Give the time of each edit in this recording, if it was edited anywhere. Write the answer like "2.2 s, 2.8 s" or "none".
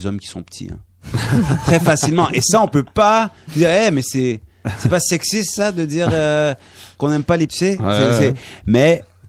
7.5 s